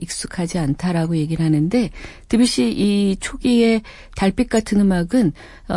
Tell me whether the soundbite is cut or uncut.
uncut